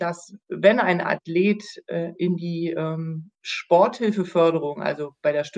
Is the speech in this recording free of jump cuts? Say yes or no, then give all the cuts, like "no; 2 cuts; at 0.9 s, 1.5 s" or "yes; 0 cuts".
yes; 0 cuts